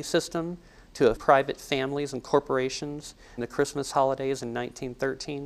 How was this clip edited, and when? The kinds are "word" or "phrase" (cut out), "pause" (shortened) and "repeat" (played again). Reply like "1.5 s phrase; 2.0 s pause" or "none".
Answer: 1.2 s word; 3.4 s word